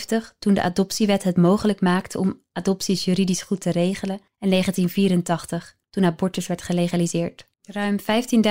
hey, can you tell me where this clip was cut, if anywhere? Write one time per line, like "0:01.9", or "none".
0:04.3
0:05.8
0:07.5